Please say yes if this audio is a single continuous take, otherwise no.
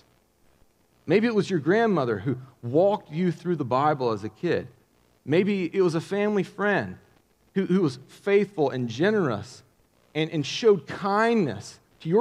yes